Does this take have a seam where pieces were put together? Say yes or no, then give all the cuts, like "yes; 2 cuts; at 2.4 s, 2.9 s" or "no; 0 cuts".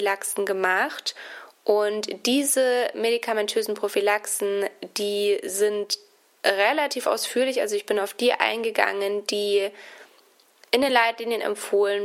no; 0 cuts